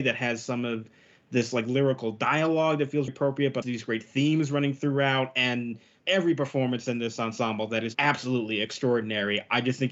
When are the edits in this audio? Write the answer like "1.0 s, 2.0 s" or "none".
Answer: 3.1 s, 3.6 s, 6.0 s, 7.9 s